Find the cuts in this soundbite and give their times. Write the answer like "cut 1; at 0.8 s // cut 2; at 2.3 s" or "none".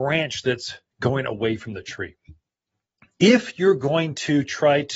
none